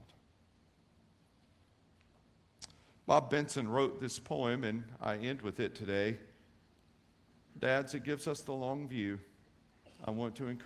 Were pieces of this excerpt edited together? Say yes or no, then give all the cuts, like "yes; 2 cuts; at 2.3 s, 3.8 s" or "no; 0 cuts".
no; 0 cuts